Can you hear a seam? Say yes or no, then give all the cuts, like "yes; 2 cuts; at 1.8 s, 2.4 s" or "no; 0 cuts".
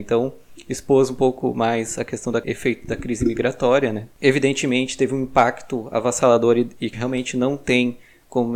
yes; 1 cut; at 6.9 s